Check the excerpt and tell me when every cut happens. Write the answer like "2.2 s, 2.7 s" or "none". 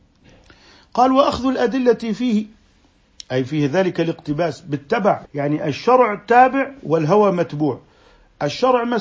5.2 s